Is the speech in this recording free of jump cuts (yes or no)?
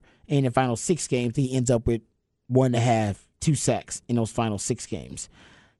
yes